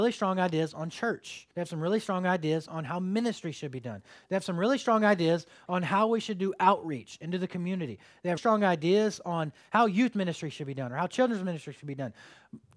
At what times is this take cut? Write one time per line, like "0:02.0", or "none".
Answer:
0:01.5
0:08.4